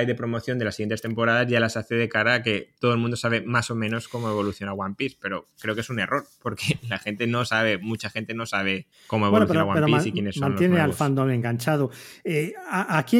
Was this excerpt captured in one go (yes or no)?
no